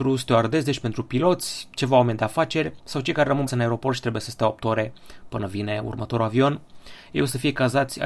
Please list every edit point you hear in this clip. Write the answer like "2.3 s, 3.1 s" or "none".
3.5 s